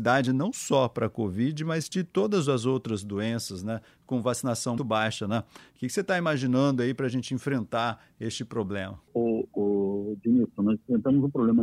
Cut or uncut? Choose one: cut